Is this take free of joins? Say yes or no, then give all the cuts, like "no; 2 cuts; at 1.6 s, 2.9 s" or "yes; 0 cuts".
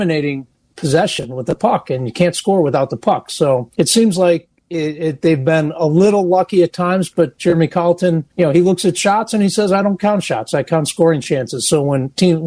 no; 2 cuts; at 3.7 s, 8.3 s